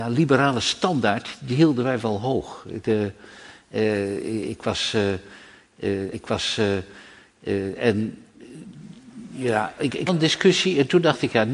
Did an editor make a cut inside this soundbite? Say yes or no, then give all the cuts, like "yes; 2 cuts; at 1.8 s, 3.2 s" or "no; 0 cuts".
yes; 2 cuts; at 6.1 s, 10.1 s